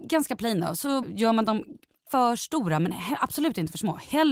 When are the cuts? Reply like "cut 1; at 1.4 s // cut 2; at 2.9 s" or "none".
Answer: cut 1; at 1.0 s // cut 2; at 2.1 s